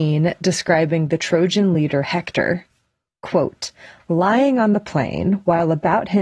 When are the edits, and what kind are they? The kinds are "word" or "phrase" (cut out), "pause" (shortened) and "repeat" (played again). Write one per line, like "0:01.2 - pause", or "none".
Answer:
none